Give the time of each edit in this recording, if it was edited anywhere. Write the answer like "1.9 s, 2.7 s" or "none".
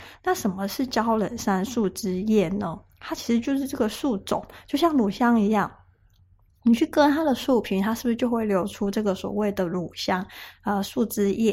none